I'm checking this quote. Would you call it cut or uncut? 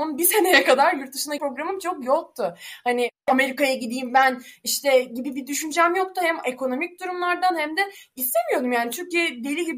cut